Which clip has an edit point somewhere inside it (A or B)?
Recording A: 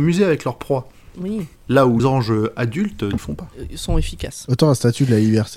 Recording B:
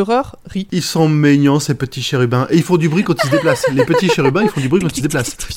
A